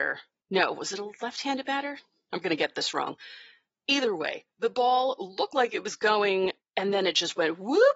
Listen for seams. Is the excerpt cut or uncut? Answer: uncut